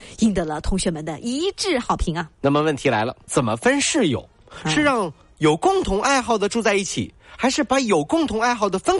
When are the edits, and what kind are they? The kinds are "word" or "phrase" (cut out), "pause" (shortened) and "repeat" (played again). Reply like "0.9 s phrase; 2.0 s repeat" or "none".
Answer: 3.3 s word